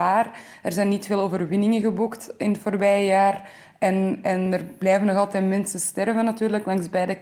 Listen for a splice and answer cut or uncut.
uncut